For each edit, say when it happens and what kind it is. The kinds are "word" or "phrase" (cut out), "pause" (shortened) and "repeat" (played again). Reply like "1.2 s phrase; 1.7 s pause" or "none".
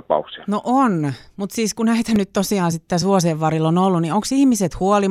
none